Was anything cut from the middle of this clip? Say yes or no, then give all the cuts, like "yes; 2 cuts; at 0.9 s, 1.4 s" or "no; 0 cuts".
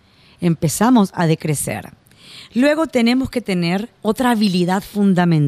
yes; 1 cut; at 4.0 s